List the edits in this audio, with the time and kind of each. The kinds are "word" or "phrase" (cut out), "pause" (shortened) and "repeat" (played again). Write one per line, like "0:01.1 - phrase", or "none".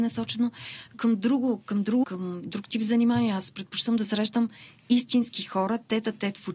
0:00.9 - word
0:02.0 - word